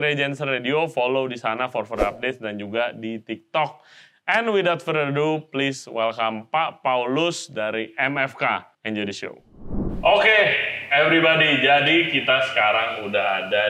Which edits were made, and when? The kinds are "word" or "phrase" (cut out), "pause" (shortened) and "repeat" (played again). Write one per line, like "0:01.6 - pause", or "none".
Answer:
0:08.7 - pause